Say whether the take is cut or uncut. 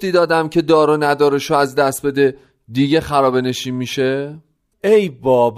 uncut